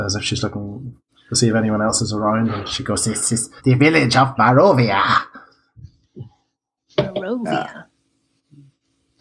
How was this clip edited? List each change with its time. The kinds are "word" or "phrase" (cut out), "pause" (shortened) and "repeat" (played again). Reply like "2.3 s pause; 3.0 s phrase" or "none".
1.1 s pause; 3.6 s pause

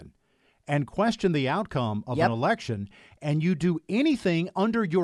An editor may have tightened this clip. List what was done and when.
none

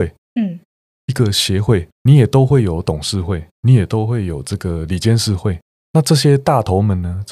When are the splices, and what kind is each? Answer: 3.5 s pause

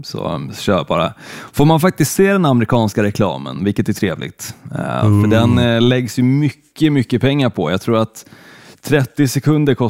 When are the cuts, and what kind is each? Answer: none

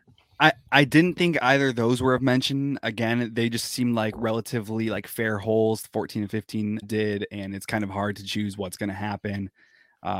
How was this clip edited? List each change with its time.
6.8 s word

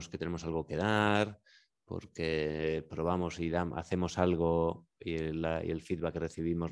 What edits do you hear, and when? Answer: none

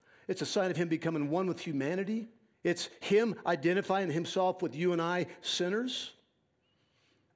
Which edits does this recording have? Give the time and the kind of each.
2.5 s pause

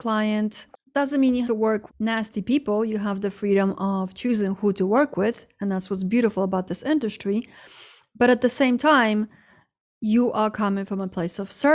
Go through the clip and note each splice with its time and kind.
1.4 s word; 1.9 s word

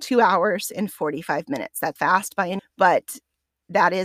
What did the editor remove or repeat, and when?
2.0 s word; 2.6 s word

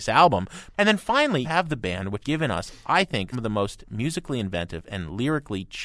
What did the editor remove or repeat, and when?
1.4 s word; 2.2 s word; 3.3 s word

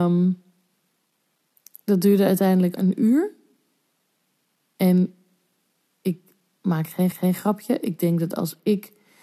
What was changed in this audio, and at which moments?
2.8 s phrase; 7.1 s repeat

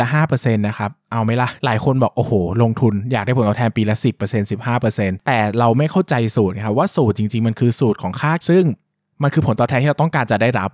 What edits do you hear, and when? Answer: 8.4 s word

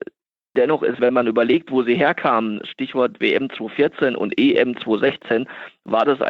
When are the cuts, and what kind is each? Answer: 1.0 s word

